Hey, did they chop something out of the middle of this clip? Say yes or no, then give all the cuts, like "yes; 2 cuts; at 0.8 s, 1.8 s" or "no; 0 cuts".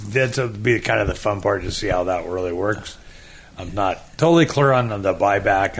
no; 0 cuts